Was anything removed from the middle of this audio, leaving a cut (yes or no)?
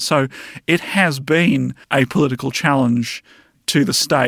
yes